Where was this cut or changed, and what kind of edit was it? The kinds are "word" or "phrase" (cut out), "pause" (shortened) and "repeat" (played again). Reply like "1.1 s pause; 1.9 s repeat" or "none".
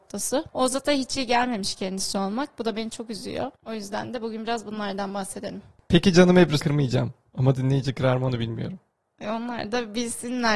3.6 s pause; 6.6 s word